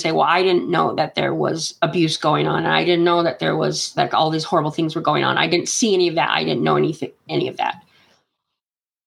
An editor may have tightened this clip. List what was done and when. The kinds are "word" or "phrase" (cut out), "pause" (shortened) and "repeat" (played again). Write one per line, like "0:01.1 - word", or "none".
none